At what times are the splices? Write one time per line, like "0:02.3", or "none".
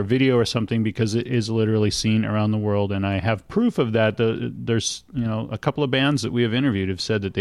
none